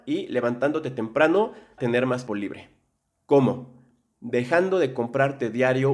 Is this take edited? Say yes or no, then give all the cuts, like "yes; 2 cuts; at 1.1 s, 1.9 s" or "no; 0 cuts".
yes; 2 cuts; at 1.8 s, 2.3 s